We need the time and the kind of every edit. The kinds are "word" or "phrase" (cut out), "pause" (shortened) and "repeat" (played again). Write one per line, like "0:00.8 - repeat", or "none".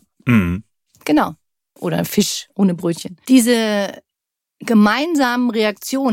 none